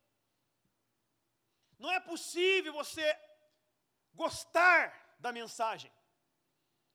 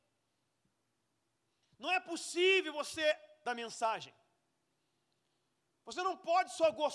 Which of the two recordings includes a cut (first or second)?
second